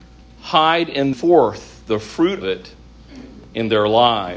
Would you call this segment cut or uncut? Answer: cut